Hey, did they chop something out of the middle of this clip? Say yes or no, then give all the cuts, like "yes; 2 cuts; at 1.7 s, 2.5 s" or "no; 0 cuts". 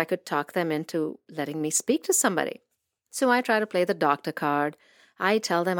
no; 0 cuts